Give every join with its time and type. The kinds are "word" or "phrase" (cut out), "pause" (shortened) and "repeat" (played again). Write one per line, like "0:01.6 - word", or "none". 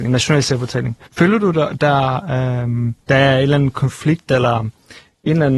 0:01.1 - pause
0:03.0 - pause